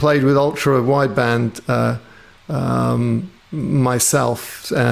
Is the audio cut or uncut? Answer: cut